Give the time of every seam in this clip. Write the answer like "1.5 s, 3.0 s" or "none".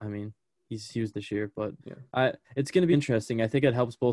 1.1 s, 1.8 s, 2.4 s, 2.9 s